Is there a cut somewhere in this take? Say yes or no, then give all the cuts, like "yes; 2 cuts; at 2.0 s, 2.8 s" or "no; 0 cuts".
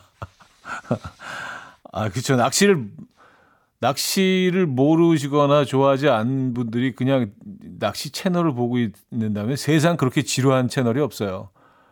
no; 0 cuts